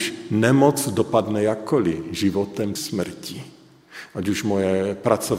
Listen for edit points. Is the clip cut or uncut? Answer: cut